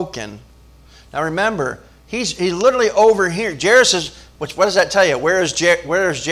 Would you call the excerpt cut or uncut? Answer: uncut